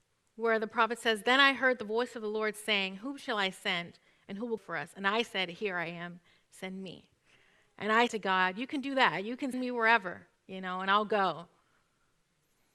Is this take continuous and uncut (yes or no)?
no